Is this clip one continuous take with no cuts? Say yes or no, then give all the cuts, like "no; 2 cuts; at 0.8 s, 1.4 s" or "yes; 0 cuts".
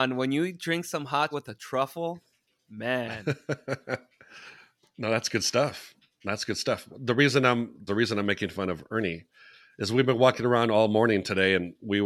no; 2 cuts; at 1.3 s, 7.9 s